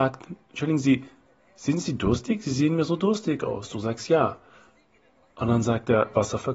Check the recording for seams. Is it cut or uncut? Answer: uncut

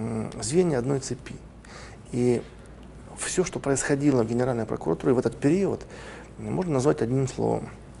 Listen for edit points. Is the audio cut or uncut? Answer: uncut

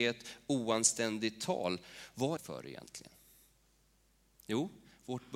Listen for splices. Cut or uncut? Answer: cut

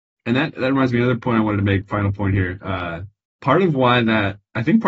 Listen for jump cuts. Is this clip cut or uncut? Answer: cut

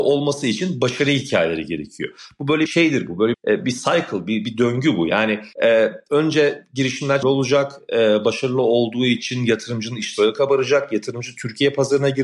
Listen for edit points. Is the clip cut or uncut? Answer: cut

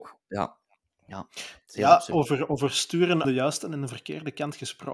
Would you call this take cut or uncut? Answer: cut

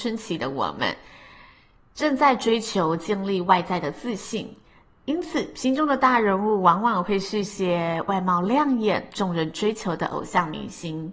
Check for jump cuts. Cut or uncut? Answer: uncut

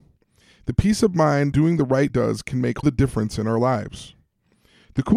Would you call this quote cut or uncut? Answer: cut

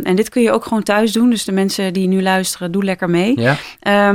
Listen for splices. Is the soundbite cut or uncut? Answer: uncut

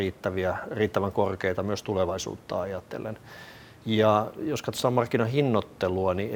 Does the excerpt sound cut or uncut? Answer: uncut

